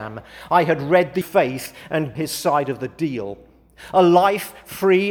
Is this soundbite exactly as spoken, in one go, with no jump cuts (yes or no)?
no